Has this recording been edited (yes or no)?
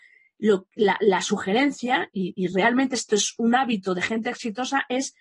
no